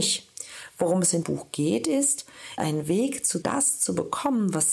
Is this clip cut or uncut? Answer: cut